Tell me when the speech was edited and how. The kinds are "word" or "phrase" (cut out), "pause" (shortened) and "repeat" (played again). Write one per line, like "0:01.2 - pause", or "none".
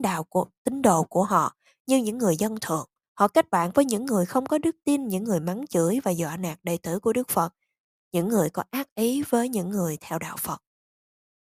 0:03.0 - pause